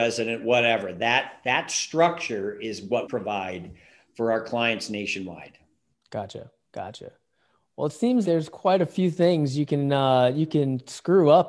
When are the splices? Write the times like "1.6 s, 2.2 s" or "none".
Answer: 3.1 s, 8.2 s